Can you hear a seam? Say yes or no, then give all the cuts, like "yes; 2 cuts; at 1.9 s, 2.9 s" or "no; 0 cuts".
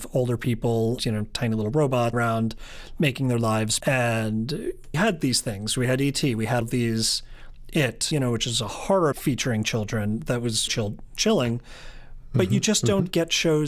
yes; 8 cuts; at 1.0 s, 2.1 s, 3.8 s, 4.9 s, 6.6 s, 8.1 s, 9.1 s, 10.7 s